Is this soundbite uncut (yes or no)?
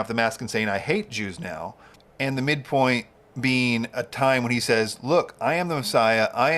yes